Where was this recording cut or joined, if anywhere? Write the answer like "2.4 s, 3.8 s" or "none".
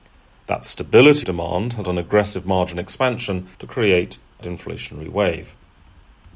1.2 s, 1.8 s, 3.5 s, 4.4 s